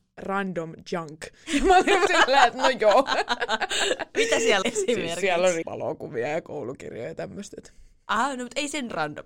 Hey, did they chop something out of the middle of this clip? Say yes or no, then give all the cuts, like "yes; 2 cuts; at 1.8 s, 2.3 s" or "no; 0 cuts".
yes; 3 cuts; at 2.1 s, 4.6 s, 5.6 s